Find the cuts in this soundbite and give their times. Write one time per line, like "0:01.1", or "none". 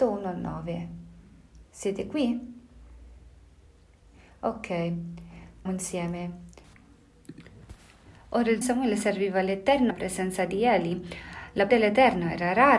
0:05.7
0:08.6
0:09.9
0:11.7